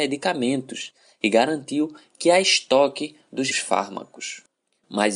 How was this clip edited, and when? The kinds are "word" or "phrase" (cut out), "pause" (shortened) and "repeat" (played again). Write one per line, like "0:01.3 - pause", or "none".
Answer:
0:03.5 - word